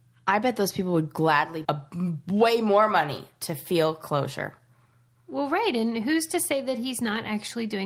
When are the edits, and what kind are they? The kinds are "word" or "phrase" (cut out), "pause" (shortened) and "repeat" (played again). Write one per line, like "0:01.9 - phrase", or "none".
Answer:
0:01.6 - word